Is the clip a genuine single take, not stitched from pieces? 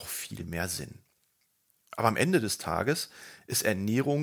yes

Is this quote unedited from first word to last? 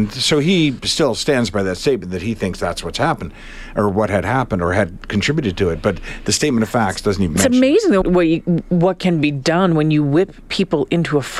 no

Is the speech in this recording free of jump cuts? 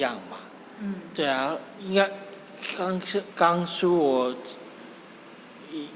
no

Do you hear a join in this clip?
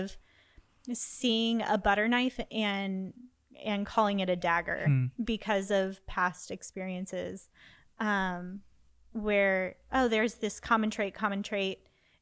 no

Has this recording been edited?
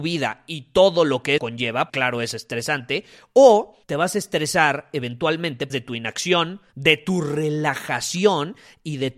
yes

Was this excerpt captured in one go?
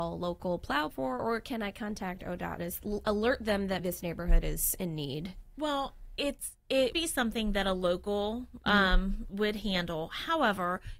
no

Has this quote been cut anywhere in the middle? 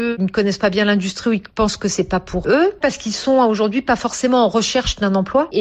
yes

